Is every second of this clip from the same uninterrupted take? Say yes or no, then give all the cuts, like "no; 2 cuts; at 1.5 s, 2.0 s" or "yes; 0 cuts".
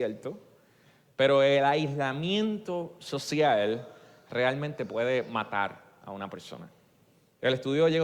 yes; 0 cuts